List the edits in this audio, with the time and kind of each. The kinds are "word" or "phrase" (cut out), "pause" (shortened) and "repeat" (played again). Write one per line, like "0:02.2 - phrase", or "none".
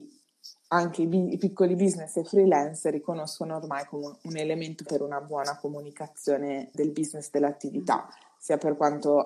0:04.9 - word
0:06.7 - word